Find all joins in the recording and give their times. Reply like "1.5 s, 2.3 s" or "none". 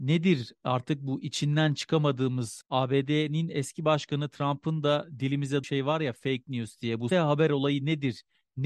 2.6 s, 5.6 s, 7.1 s